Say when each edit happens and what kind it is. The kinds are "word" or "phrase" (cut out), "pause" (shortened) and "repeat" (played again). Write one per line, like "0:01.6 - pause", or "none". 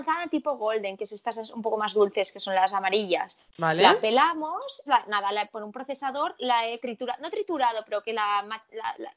0:03.5 - pause
0:04.9 - phrase
0:06.8 - word